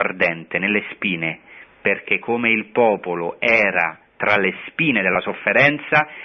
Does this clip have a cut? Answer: no; 0 cuts

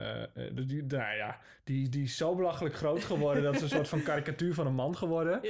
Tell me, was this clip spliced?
no; 0 cuts

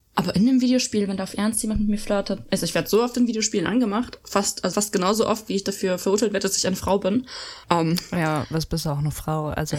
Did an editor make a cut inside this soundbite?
yes; 2 cuts; at 4.7 s, 7.6 s

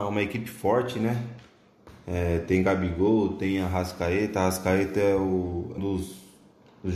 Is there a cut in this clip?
yes; 1 cut; at 5.8 s

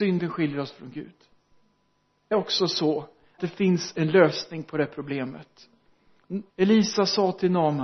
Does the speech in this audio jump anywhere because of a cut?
yes; 3 cuts; at 2.3 s, 3.4 s, 6.5 s

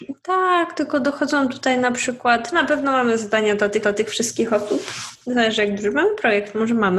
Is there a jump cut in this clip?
yes; 2 cuts; at 2.5 s, 3.8 s

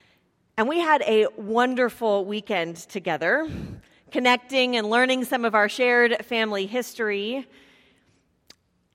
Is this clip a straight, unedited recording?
yes; 0 cuts

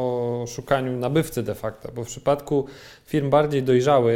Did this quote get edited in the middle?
no; 0 cuts

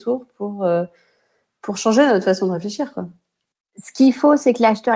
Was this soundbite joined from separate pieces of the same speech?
no; 0 cuts

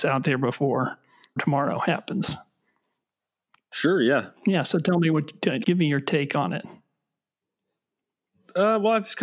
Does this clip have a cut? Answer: yes; 3 cuts; at 1.4 s, 4.4 s, 5.6 s

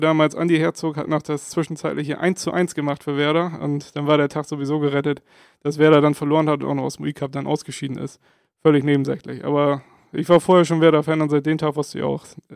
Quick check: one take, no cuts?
yes; 0 cuts

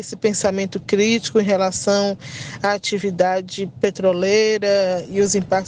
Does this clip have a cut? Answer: no; 0 cuts

